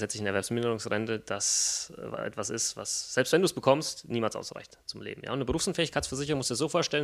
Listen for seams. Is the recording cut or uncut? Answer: uncut